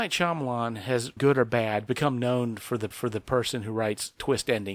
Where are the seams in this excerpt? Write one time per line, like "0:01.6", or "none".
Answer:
0:01.2
0:02.9